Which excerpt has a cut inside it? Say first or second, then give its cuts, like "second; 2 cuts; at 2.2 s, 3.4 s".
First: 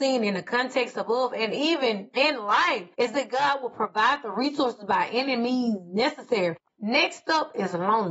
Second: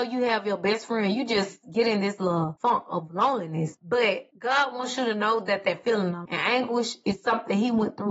second; 1 cut; at 6.2 s